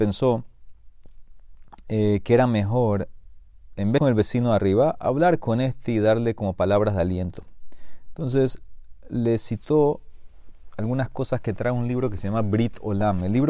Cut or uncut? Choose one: cut